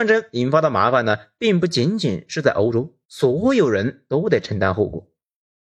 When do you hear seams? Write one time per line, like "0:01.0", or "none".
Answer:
0:03.0